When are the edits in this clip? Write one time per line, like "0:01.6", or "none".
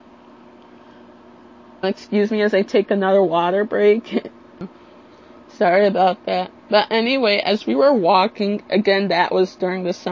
0:01.8
0:04.7
0:06.6

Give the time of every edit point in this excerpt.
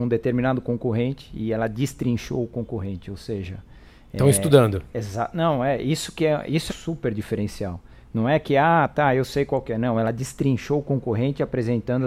0:06.7

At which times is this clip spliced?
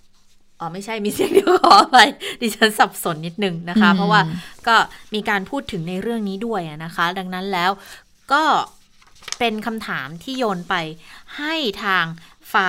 none

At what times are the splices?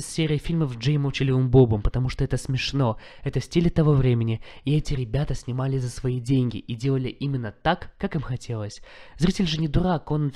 none

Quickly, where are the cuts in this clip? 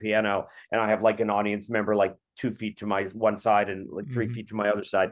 none

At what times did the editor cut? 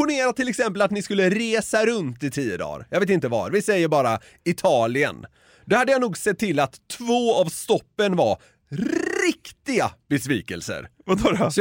none

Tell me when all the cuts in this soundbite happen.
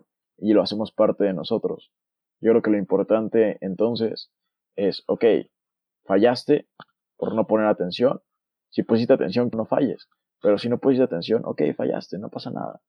0:09.5

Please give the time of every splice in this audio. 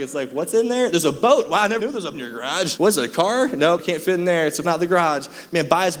0:01.8
0:02.1
0:02.8
0:03.8
0:04.6

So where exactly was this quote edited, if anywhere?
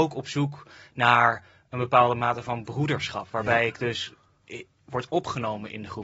none

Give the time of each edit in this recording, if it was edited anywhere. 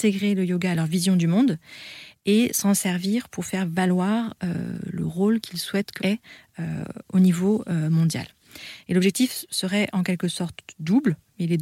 0:06.0

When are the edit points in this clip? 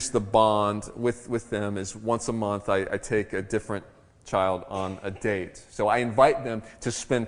none

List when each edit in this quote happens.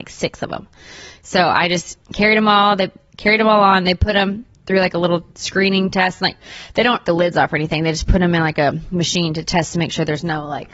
0:02.0
0:05.3
0:07.0

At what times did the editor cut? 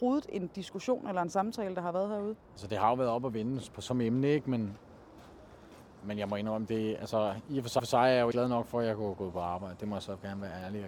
0:02.4
0:05.9
0:07.8
0:08.3

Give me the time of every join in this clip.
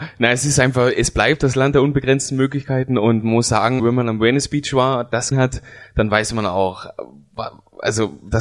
0:03.8
0:05.3

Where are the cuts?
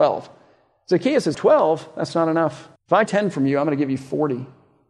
0:01.3
0:02.8
0:03.1

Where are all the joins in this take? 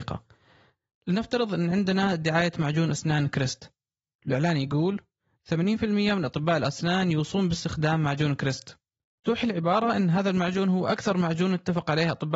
none

